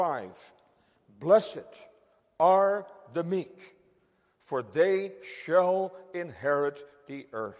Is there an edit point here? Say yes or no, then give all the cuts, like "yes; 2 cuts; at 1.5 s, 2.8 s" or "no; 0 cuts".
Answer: no; 0 cuts